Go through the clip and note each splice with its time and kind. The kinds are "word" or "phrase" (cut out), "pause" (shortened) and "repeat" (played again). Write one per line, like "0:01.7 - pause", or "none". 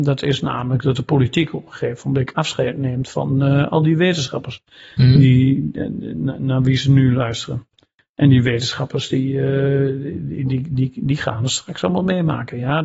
none